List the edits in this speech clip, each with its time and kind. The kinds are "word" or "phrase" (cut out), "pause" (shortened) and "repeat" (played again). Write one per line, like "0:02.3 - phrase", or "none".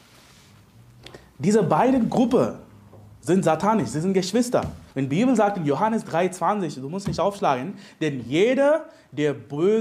0:04.9 - pause